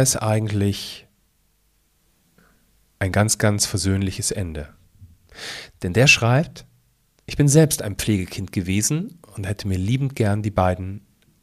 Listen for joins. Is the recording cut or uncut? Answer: uncut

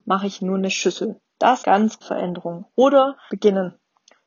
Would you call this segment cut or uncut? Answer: cut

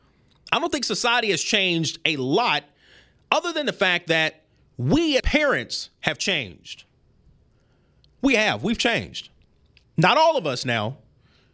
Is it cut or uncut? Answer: cut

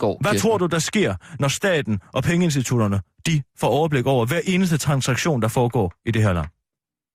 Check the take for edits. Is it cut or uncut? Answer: cut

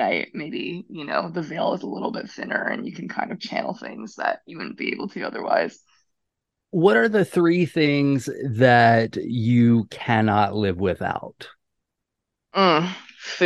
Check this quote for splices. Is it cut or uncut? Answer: uncut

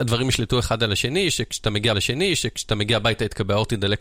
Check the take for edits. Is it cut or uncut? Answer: cut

